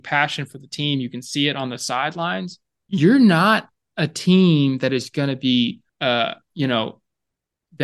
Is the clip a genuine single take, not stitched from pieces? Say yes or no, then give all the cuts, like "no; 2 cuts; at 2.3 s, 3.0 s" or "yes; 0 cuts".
no; 2 cuts; at 2.8 s, 5.9 s